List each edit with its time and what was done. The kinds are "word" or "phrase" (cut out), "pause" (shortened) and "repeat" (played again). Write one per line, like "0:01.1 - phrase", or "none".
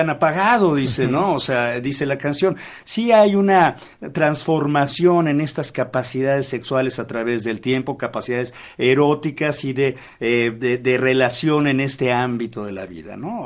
none